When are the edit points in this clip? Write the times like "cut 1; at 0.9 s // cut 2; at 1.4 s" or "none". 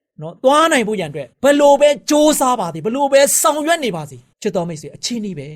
cut 1; at 1.3 s // cut 2; at 4.3 s